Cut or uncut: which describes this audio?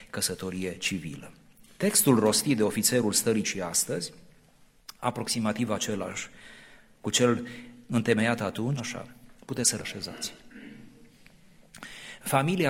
cut